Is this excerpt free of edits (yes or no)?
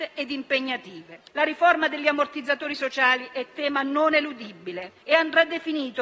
no